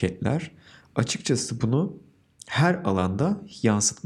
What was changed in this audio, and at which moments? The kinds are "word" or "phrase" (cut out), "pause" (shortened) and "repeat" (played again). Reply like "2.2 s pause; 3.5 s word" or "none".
none